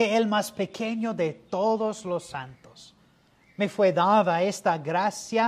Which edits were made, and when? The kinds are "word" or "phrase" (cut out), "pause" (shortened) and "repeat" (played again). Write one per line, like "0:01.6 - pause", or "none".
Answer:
none